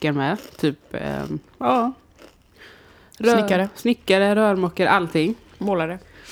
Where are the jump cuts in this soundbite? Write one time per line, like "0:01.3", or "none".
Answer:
none